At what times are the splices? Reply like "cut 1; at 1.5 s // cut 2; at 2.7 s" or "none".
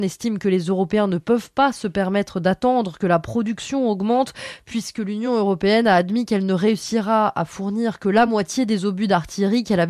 none